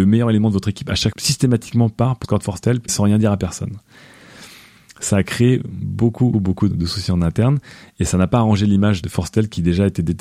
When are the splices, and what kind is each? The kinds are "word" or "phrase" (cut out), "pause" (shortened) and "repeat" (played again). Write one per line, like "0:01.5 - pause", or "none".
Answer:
0:01.1 - word
0:02.2 - word
0:02.9 - word
0:06.3 - word
0:06.7 - word
0:09.0 - word

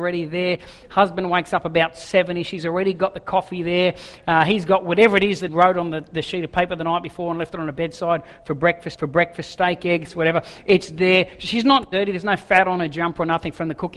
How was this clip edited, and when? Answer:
0:05.5 - word
0:08.9 - repeat

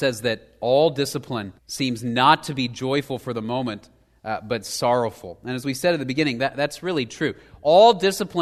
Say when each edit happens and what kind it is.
0:01.6 - pause

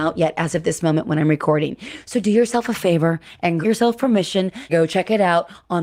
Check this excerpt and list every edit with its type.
0:03.6 - word
0:04.7 - word

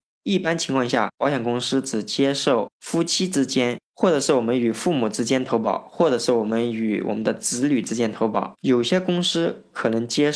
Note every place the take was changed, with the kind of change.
0:08.6 - pause

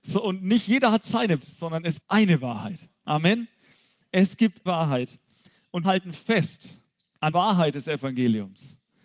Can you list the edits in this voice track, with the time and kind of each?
0:01.4 - word
0:02.0 - word
0:04.7 - word
0:05.8 - word
0:07.3 - word

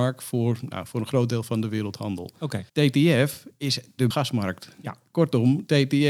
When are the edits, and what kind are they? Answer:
0:02.7 - pause
0:04.1 - phrase

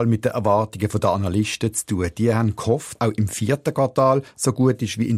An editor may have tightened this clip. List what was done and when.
0:03.0 - phrase

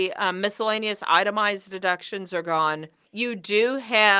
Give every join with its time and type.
none

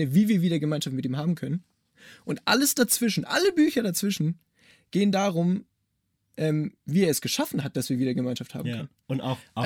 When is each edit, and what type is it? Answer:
none

